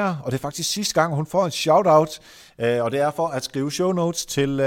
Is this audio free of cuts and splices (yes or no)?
yes